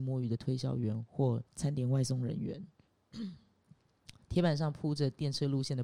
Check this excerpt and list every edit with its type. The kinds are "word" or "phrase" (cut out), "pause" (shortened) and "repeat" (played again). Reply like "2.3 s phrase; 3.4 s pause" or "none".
1.5 s pause